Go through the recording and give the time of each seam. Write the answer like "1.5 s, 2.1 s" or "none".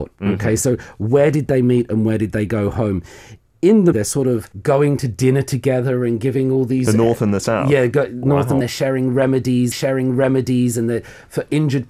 3.9 s, 4.5 s, 8.6 s, 9.7 s

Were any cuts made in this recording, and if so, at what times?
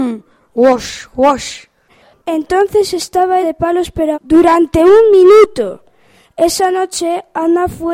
3.4 s, 4.1 s

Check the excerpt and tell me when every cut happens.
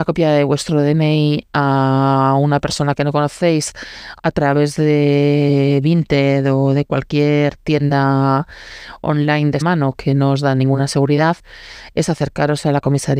9.6 s

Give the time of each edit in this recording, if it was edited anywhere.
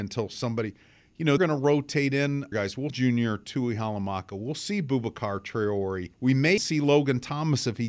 1.4 s, 2.5 s, 2.9 s, 6.1 s, 6.6 s

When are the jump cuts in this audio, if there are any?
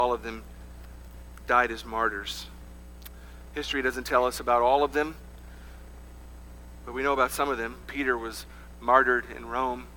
7.8 s

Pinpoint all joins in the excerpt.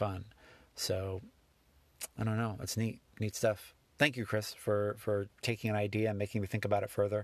2.2 s, 3.1 s

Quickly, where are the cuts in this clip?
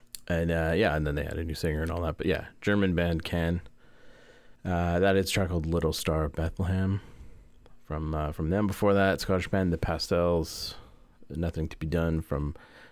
4.6 s

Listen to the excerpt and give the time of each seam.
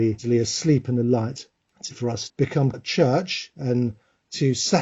1.9 s, 2.3 s, 2.7 s

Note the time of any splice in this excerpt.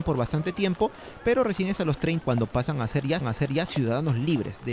2.2 s, 3.2 s

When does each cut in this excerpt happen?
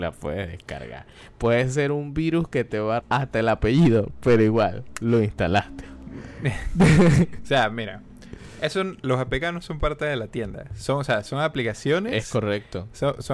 3.0 s

